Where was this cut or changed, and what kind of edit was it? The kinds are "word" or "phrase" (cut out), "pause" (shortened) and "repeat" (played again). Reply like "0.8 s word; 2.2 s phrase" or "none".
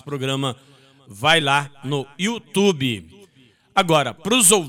none